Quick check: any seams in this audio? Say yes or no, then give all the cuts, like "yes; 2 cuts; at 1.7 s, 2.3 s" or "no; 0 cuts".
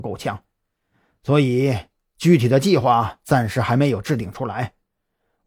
no; 0 cuts